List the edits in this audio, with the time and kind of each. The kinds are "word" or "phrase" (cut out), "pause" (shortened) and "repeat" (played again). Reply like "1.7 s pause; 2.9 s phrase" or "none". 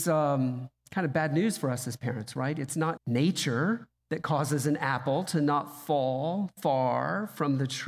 3.0 s word; 4.0 s pause